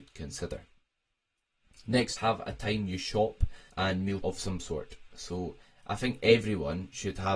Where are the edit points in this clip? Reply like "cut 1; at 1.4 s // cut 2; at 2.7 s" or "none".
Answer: cut 1; at 2.2 s // cut 2; at 3.7 s // cut 3; at 4.2 s